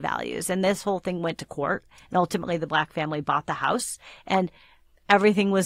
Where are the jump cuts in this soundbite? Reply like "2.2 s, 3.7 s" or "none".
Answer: none